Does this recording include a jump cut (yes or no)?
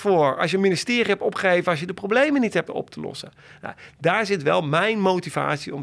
yes